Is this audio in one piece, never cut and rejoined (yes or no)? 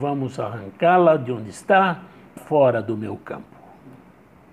no